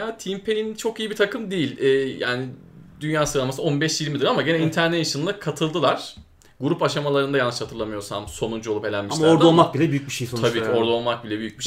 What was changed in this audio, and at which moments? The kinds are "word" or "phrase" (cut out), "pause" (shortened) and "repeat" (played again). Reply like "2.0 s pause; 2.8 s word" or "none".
none